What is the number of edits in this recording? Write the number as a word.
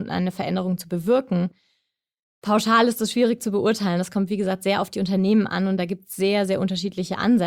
zero